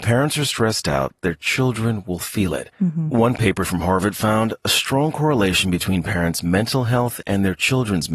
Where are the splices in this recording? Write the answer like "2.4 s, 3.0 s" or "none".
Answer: 2.7 s